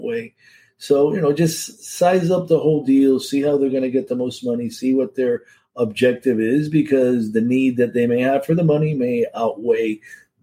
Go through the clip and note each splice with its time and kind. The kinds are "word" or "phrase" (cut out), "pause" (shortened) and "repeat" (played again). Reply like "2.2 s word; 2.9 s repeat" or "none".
none

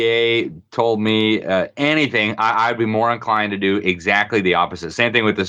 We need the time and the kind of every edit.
none

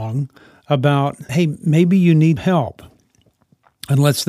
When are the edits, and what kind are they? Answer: 1.3 s word; 2.4 s word

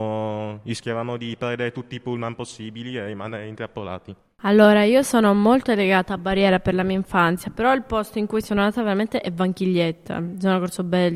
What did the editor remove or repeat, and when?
none

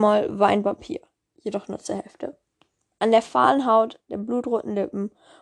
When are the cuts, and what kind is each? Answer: none

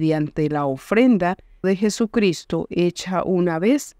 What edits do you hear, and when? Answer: 1.6 s phrase

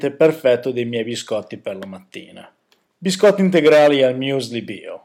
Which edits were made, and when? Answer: 2.9 s pause

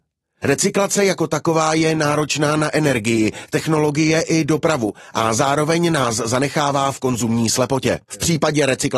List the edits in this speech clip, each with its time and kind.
8.0 s pause

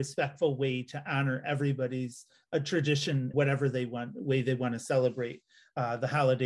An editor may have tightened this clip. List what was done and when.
3.3 s word

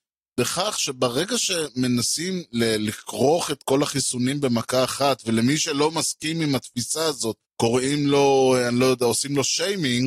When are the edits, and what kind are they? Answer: 7.5 s pause

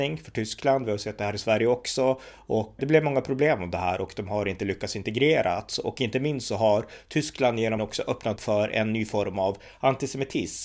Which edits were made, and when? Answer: 2.8 s word; 7.8 s word; 8.4 s word

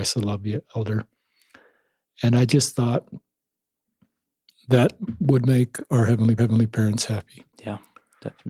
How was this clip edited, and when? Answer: 6.4 s repeat; 7.5 s pause

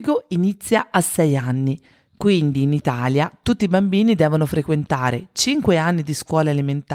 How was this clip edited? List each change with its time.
none

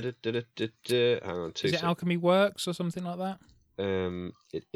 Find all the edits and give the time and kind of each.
none

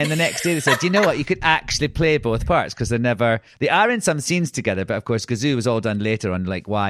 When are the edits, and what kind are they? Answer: none

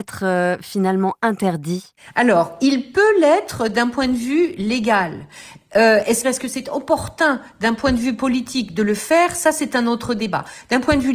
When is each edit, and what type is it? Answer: 6.2 s phrase

